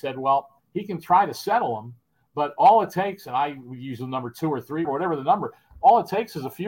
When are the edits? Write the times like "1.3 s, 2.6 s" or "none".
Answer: 4.8 s